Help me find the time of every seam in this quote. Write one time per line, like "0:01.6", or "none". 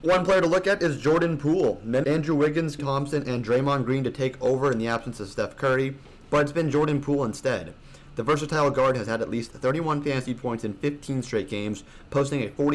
0:02.0
0:02.8